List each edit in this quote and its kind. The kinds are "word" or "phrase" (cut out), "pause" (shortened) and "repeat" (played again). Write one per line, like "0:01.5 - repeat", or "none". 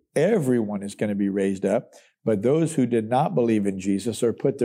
none